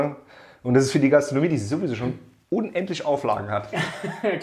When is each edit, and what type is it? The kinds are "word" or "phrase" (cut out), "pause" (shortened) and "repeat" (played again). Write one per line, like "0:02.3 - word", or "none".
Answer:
none